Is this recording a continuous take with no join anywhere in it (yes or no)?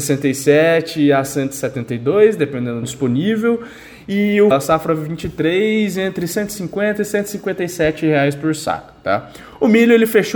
no